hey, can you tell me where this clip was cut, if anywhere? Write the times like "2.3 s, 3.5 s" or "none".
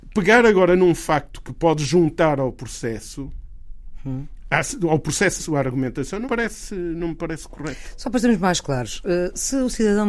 5.4 s, 6.2 s